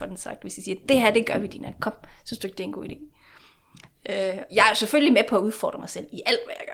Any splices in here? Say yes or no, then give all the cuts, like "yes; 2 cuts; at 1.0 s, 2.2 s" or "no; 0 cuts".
yes; 1 cut; at 4.5 s